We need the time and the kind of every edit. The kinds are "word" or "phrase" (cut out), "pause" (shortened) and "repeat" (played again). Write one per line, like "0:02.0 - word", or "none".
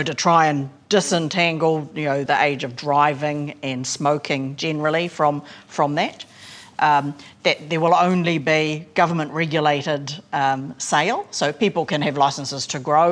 0:02.3 - word

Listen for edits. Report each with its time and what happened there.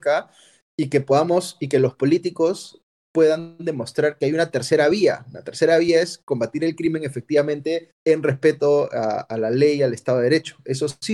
0:08.0 - word

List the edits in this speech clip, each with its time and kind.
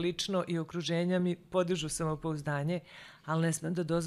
none

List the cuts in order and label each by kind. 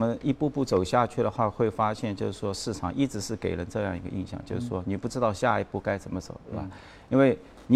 none

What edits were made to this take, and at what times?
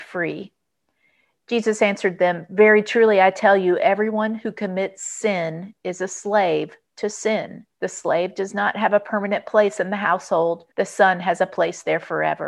0:07.7 - pause
0:10.7 - pause

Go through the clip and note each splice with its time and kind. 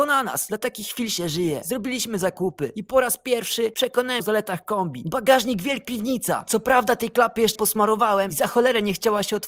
0:04.2 - word
0:05.8 - word
0:07.5 - word

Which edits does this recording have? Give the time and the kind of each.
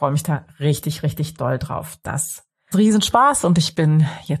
0:02.7 - word

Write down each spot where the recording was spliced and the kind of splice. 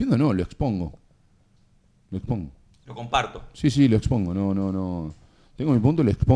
none

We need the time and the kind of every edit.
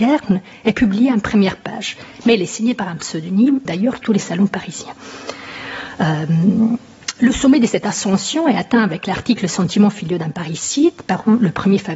0:03.6 - word

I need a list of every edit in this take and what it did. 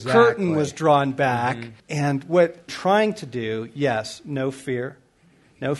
0:01.8 - pause
0:02.7 - word

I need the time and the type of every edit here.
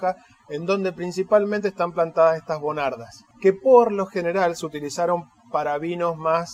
0:03.3 - pause

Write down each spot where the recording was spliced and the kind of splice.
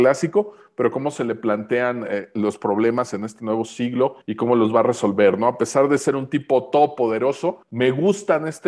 0:04.2 - pause
0:07.6 - pause

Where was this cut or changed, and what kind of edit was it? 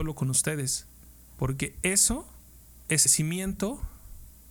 0:03.1 - phrase

